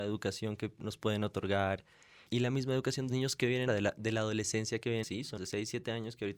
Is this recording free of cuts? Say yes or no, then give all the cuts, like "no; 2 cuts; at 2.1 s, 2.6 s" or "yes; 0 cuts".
no; 5 cuts; at 2.3 s, 3.1 s, 3.7 s, 5.0 s, 5.4 s